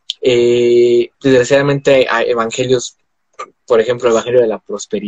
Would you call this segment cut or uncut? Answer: cut